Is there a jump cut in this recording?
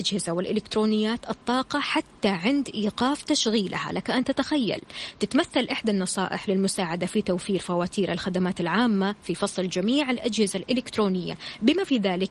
no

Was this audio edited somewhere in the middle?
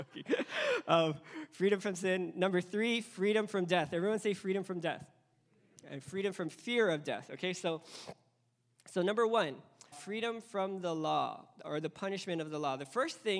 yes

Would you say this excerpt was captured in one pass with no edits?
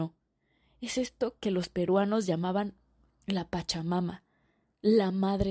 yes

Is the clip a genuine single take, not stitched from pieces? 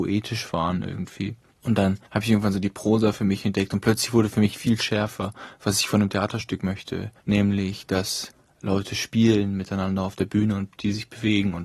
no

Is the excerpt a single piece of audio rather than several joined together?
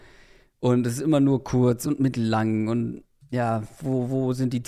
yes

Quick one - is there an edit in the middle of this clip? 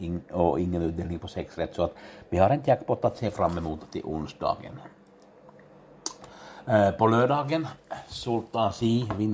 no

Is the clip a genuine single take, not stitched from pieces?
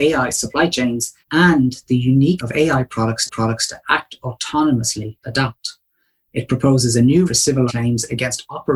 no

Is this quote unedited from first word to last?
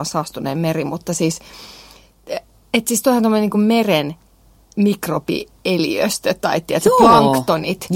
yes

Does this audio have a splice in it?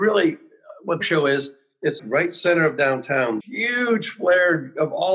yes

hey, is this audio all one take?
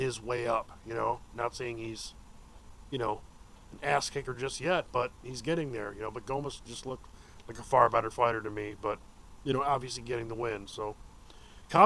yes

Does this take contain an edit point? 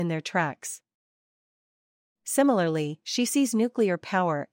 no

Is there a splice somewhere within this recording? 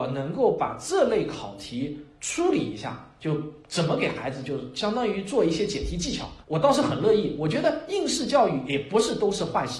yes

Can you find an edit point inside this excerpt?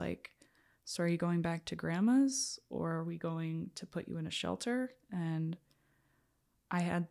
no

